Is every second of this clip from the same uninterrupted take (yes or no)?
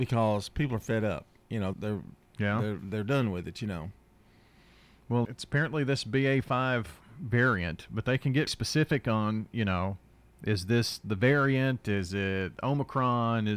no